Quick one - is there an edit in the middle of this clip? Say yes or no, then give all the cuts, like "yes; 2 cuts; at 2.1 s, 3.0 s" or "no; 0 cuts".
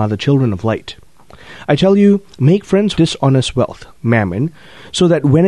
yes; 2 cuts; at 2.9 s, 3.9 s